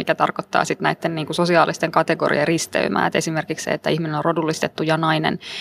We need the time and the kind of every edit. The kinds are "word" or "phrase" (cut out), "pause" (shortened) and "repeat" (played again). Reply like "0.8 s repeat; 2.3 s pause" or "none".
none